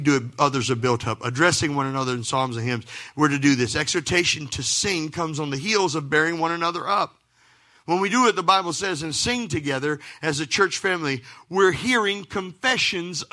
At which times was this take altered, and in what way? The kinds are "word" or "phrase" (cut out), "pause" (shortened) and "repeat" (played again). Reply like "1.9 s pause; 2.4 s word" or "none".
none